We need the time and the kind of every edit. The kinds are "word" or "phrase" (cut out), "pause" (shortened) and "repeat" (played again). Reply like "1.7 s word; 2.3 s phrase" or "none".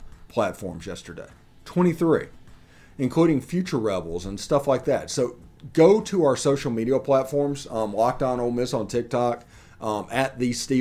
none